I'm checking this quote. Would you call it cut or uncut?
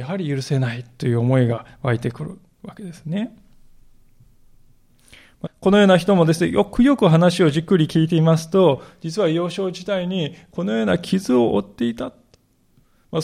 cut